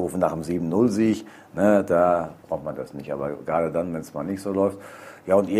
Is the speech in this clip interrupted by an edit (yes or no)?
yes